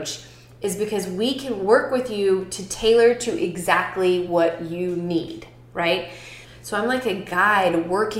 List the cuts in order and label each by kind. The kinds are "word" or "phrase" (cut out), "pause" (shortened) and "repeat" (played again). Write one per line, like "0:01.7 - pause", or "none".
none